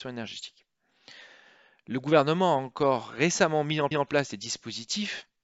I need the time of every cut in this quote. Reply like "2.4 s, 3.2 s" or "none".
3.9 s